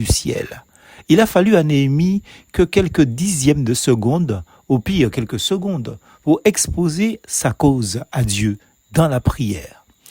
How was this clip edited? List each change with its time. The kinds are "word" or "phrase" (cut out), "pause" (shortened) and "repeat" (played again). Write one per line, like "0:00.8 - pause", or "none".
none

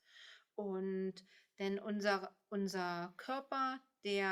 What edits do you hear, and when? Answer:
none

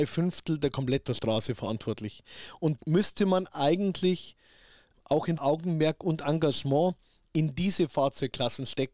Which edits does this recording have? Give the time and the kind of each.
0:01.0 - phrase
0:02.8 - word
0:04.9 - word
0:05.4 - phrase

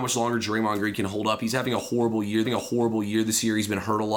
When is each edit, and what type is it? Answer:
0:02.4 - repeat

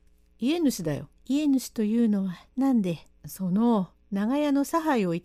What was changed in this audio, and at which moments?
0:01.1 - pause
0:03.1 - pause

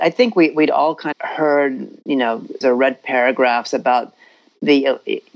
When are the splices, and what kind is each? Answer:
0:01.1 - word
0:02.6 - word

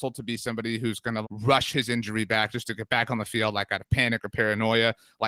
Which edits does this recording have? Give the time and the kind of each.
0:01.2 - word

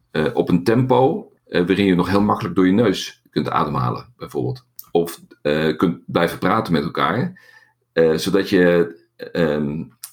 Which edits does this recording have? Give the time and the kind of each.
0:01.4 - pause

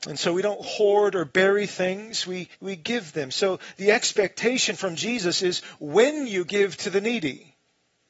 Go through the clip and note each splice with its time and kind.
0:02.5 - pause

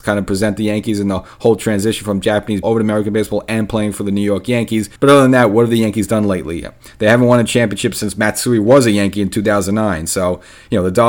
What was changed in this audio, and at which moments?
0:02.6 - word
0:05.0 - pause

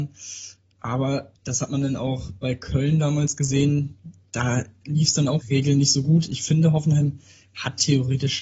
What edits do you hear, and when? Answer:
0:01.3 - pause
0:05.4 - phrase

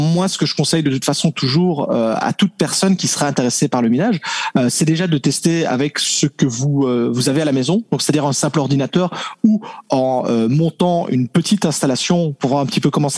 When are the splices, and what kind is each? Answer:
none

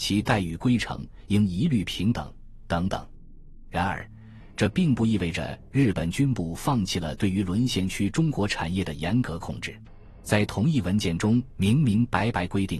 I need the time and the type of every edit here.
0:10.2 - pause

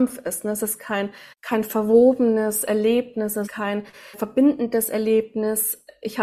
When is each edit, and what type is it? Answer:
0:01.3 - pause
0:03.5 - word
0:04.1 - word

